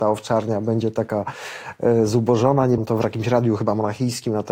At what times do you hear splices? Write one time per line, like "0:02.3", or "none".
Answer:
0:02.8